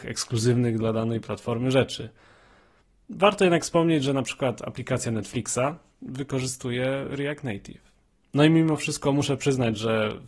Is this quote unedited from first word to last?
no; 1 cut; at 8.1 s

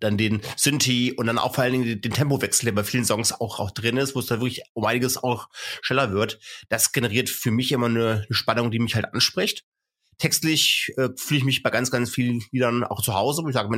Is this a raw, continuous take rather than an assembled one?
yes; 0 cuts

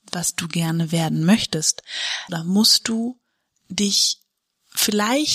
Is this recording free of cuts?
no; 1 cut; at 2.3 s

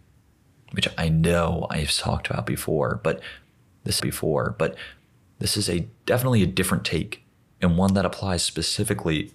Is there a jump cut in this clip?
yes; 2 cuts; at 4.0 s, 6.0 s

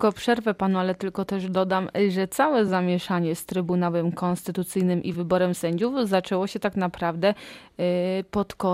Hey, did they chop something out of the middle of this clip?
no; 0 cuts

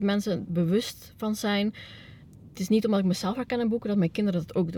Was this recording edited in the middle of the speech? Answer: no; 0 cuts

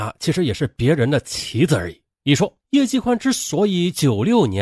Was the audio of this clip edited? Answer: yes; 2 cuts; at 2.1 s, 2.6 s

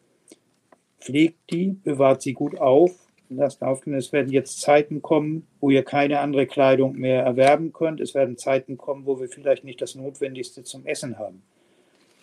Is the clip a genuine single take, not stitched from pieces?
no; 2 cuts; at 3.2 s, 5.5 s

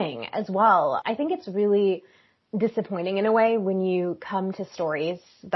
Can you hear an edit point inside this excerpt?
no; 0 cuts

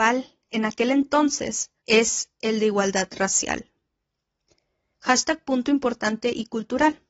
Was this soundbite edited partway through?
yes; 1 cut; at 1.8 s

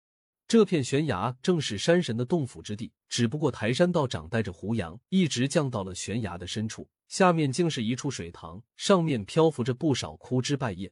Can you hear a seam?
yes; 4 cuts; at 3.0 s, 5.0 s, 7.0 s, 8.7 s

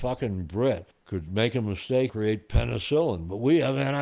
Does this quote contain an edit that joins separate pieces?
yes; 2 cuts; at 0.9 s, 2.1 s

